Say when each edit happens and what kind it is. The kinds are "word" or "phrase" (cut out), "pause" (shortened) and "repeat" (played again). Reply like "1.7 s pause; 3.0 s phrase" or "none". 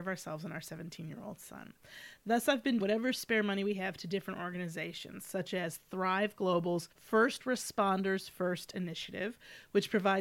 2.8 s word; 6.9 s pause

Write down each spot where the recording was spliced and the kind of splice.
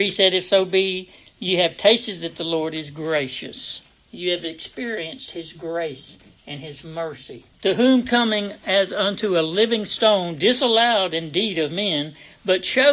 4.0 s pause; 7.5 s pause

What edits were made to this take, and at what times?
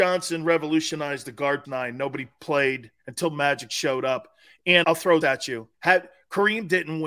1.6 s phrase; 3.0 s pause; 4.8 s word; 5.2 s word; 5.7 s pause

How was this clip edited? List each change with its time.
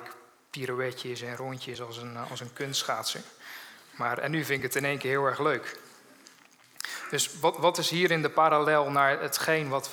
none

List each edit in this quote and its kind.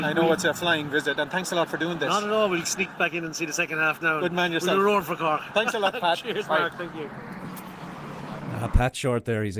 2.6 s word

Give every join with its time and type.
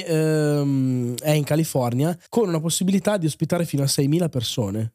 2.3 s pause

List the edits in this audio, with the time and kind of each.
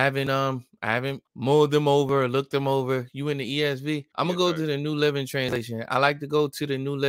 1.3 s pause; 4.1 s pause

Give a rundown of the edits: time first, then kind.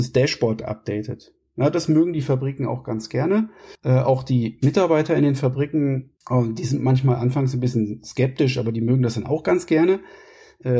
3.7 s pause; 6.2 s pause

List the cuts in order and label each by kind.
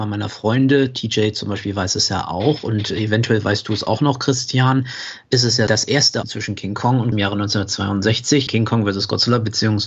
5.7 s word; 6.2 s word; 7.1 s phrase; 8.5 s word

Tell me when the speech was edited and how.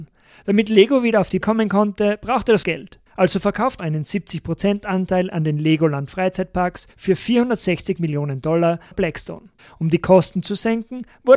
1.4 s word; 2.6 s phrase; 3.1 s pause; 3.8 s word; 6.9 s pause; 8.9 s phrase; 9.6 s pause

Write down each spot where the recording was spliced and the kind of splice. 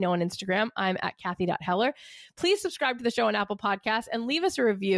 none

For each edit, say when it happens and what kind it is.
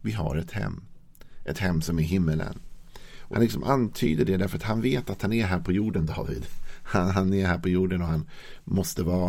3.3 s phrase

